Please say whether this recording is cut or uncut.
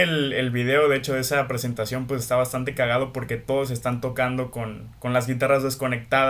uncut